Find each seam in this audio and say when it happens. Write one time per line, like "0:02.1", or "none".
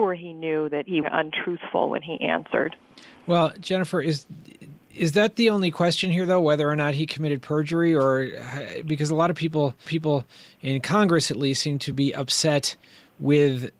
0:01.0
0:09.9

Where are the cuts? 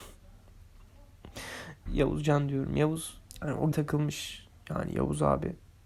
0:01.9
0:03.3
0:03.7

